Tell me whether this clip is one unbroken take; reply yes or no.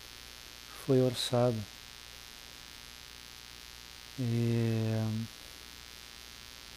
yes